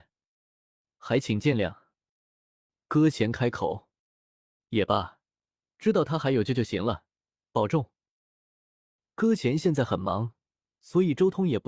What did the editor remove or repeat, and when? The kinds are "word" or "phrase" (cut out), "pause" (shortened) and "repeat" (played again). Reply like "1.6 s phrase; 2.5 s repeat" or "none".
none